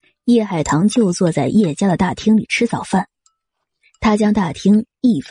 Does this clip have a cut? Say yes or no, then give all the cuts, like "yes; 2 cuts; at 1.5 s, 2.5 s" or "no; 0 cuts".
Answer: no; 0 cuts